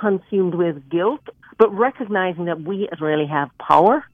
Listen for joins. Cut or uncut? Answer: cut